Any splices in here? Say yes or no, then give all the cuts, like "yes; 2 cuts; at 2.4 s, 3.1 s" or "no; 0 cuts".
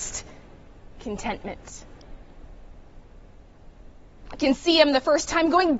yes; 1 cut; at 0.9 s